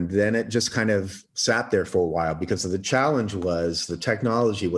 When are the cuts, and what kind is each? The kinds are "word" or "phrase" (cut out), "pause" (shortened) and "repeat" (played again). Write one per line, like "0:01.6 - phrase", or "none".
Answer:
0:01.3 - pause